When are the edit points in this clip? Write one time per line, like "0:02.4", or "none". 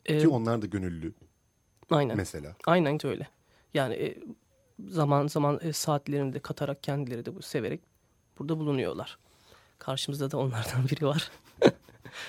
0:03.0